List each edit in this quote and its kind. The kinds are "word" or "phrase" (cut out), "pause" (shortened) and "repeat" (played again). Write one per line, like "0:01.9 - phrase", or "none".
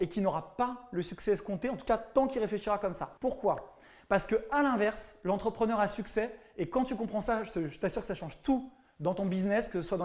0:03.2 - pause